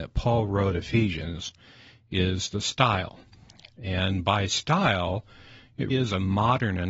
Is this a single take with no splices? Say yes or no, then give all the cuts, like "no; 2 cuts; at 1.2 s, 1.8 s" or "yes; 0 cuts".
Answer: no; 1 cut; at 5.9 s